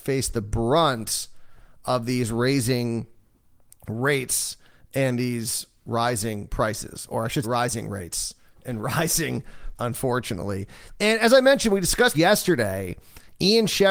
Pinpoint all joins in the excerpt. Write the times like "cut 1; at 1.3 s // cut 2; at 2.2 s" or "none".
cut 1; at 7.4 s // cut 2; at 9.7 s // cut 3; at 12.1 s